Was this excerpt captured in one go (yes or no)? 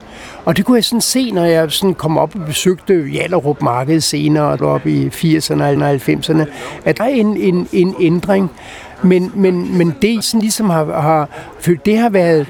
no